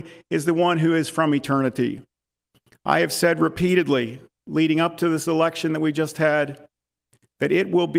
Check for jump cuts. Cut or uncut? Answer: uncut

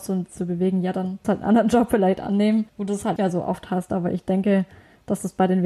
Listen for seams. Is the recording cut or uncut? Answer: cut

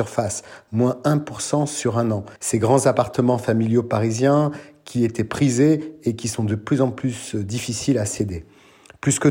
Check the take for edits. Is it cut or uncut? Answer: cut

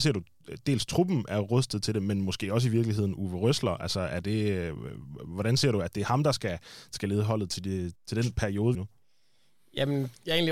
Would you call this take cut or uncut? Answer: cut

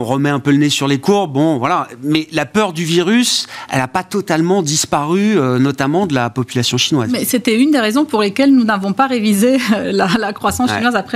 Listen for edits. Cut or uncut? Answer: uncut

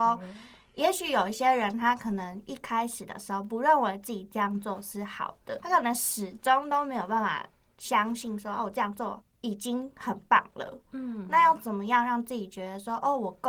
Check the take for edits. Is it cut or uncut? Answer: cut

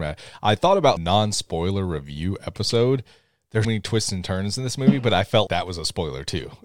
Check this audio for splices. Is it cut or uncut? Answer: cut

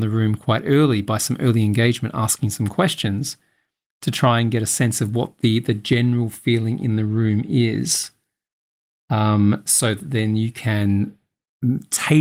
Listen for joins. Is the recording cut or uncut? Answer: uncut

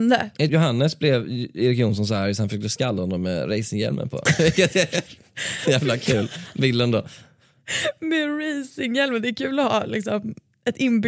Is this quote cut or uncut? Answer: uncut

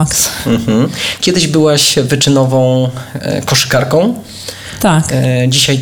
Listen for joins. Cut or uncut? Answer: uncut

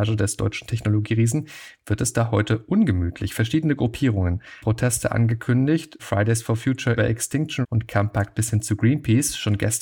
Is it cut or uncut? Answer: cut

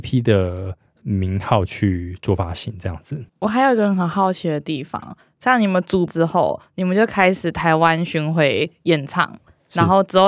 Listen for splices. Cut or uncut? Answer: cut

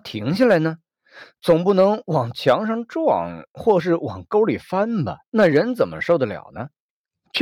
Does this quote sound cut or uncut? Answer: cut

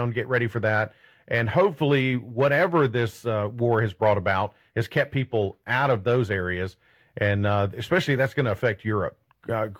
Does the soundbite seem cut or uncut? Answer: uncut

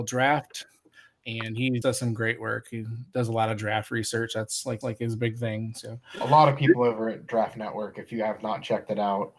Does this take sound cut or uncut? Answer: cut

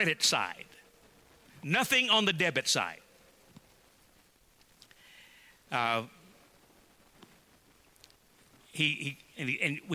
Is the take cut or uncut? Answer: uncut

